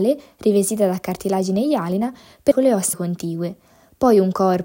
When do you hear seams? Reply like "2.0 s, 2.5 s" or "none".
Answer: 2.5 s, 2.9 s